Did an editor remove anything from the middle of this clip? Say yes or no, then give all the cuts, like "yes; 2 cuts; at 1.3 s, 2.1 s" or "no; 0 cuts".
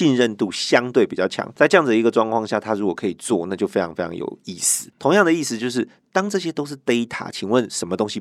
no; 0 cuts